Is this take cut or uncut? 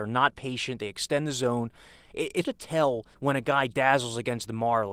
cut